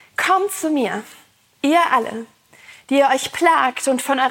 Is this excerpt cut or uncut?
uncut